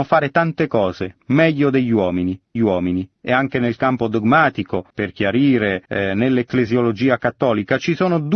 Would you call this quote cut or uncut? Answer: cut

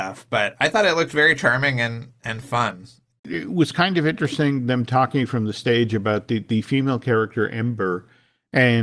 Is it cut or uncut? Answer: uncut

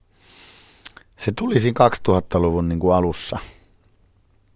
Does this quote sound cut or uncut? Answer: uncut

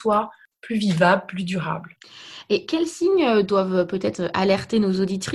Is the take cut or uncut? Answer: uncut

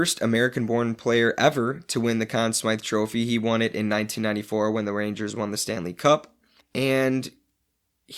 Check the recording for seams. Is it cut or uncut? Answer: cut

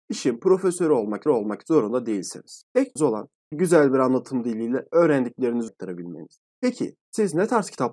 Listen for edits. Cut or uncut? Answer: cut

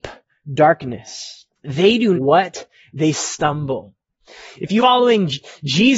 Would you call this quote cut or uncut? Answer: cut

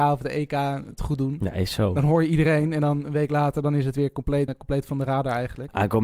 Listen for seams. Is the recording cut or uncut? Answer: cut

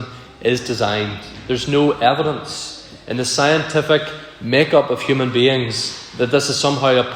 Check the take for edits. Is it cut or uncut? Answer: cut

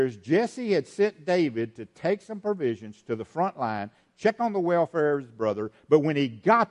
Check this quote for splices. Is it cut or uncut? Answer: uncut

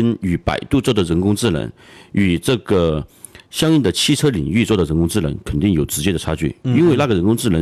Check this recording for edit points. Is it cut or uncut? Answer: uncut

